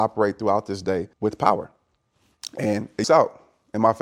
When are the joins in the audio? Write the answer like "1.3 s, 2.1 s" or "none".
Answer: 1.1 s, 3.0 s